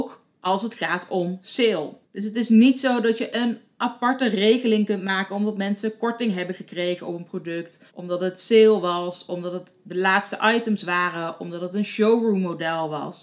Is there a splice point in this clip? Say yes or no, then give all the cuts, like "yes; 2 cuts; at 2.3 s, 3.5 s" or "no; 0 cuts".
yes; 2 cuts; at 2.0 s, 7.9 s